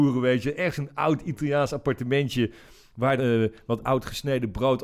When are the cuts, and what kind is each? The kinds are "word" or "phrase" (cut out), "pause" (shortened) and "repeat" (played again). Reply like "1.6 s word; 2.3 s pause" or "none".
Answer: 3.2 s word